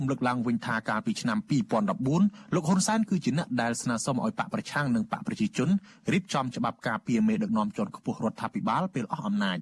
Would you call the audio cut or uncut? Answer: uncut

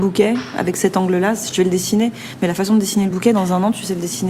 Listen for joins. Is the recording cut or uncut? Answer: uncut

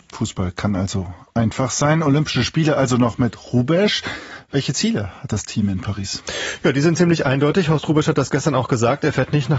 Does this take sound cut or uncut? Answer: uncut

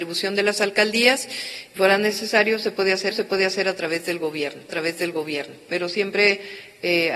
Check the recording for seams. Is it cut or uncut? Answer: cut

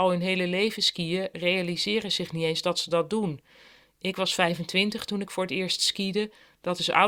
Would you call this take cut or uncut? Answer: uncut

